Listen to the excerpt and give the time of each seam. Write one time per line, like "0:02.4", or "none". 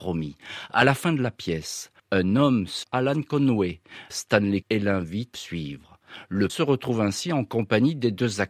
0:02.0
0:02.8
0:04.1
0:04.6
0:05.3
0:06.5